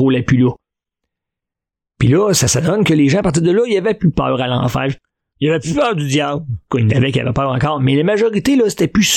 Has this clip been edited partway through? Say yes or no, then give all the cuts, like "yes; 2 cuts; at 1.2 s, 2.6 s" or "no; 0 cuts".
no; 0 cuts